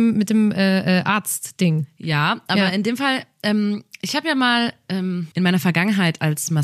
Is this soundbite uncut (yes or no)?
no